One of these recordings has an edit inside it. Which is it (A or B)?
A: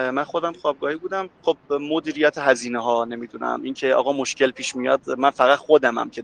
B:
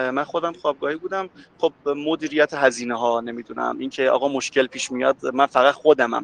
A